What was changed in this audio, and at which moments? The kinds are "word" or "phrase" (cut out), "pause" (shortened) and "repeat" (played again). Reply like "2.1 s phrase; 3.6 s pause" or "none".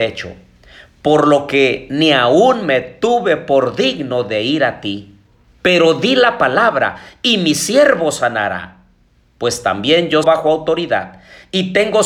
10.2 s phrase